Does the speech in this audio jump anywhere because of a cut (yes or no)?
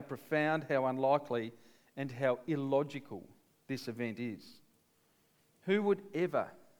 no